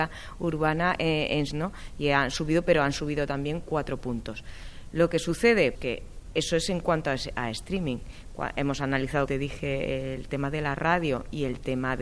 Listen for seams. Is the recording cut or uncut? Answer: cut